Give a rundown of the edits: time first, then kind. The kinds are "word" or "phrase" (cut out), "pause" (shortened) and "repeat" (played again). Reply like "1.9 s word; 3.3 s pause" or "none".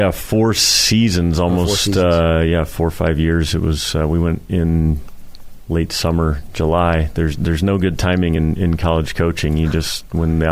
none